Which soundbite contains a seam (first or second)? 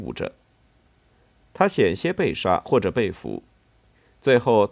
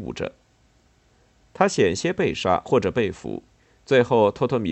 second